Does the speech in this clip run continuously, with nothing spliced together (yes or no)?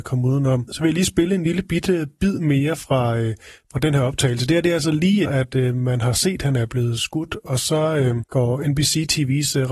no